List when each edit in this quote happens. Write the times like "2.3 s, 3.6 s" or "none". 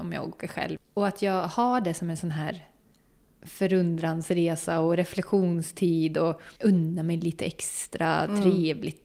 6.5 s

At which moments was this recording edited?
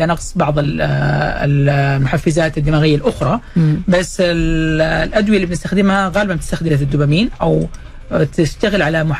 6.7 s

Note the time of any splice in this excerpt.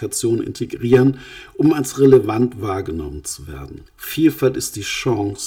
3.8 s

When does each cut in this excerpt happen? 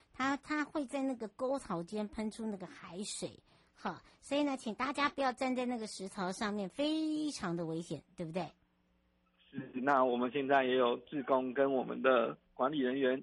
none

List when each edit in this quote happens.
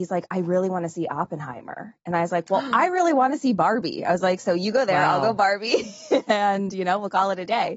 none

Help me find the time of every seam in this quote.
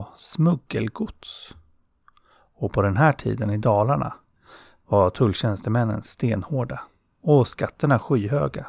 none

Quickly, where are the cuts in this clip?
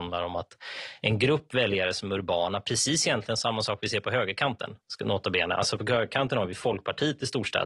none

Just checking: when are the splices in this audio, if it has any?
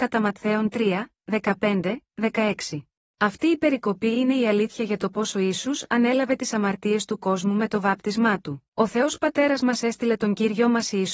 3.0 s, 8.7 s

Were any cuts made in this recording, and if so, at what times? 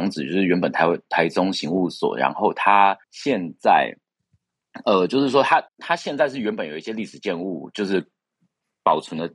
3.0 s, 5.7 s

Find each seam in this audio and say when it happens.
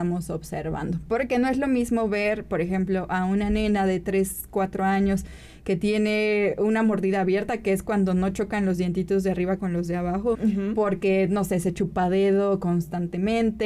10.3 s

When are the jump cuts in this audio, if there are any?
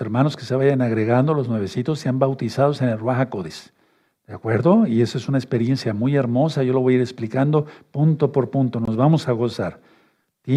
none

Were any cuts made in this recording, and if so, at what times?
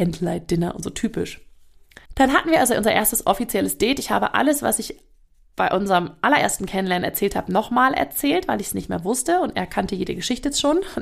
2.0 s

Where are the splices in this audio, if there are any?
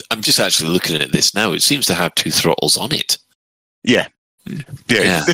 none

